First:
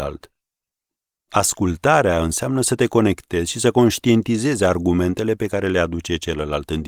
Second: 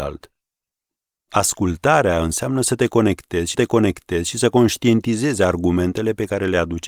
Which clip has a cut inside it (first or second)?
second